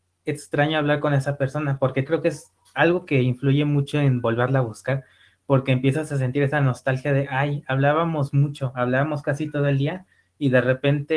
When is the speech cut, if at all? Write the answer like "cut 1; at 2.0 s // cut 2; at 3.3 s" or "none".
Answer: cut 1; at 2.1 s